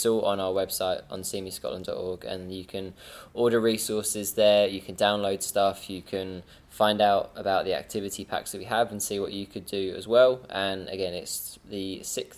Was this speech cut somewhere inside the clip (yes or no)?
no